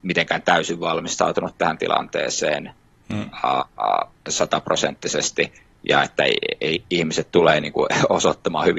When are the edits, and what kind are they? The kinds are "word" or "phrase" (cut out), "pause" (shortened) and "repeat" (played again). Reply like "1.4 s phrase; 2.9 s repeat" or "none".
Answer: 4.2 s pause